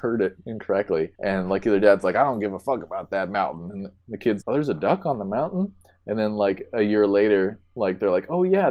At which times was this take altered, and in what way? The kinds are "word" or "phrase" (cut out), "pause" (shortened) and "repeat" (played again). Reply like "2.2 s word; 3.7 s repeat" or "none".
1.1 s pause; 4.4 s word